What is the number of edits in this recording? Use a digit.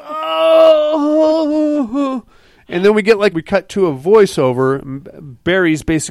1